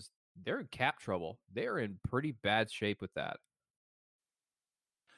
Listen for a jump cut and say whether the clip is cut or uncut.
uncut